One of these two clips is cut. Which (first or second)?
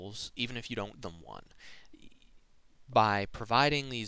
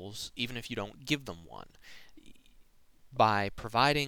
first